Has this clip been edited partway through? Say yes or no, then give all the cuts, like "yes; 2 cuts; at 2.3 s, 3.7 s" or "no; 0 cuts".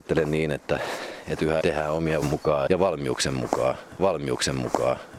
yes; 4 cuts; at 1.6 s, 2.2 s, 2.7 s, 4.0 s